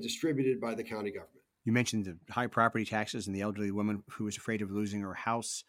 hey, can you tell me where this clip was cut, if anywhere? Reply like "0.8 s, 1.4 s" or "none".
1.5 s